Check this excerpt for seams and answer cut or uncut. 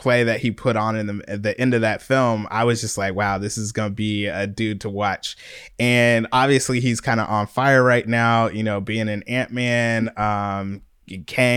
uncut